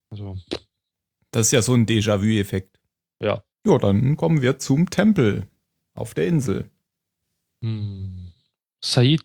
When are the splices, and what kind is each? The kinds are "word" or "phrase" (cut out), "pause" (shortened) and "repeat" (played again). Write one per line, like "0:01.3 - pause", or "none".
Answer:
0:03.5 - pause